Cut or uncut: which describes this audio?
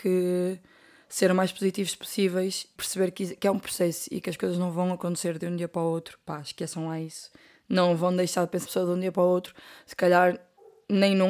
cut